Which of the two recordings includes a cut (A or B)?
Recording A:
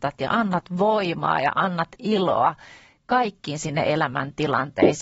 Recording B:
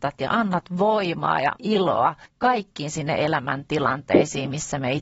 B